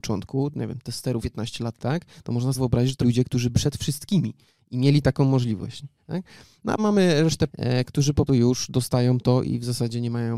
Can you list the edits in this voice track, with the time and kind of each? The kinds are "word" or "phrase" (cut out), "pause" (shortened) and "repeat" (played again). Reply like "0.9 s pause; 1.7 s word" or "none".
1.2 s word; 1.8 s word; 2.5 s word; 3.0 s word; 3.5 s word; 6.8 s word; 7.5 s word; 8.3 s word